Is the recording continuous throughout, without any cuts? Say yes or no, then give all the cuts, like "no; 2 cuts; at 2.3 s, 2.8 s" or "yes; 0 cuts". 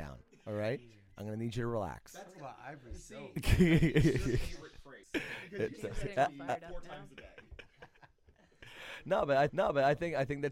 no; 2 cuts; at 5.0 s, 9.5 s